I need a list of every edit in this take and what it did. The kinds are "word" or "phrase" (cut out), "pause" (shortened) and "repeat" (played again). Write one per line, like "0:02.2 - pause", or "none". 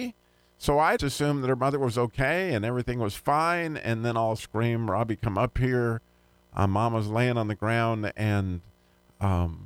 0:01.0 - word
0:04.4 - phrase